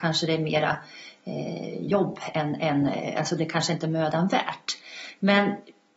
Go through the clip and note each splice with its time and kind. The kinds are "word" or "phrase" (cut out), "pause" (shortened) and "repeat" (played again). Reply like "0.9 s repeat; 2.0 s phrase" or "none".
none